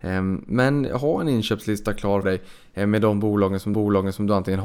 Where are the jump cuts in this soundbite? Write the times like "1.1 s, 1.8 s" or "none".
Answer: 2.2 s, 3.7 s